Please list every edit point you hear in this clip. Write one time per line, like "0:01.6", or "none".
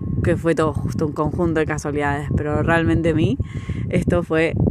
0:03.1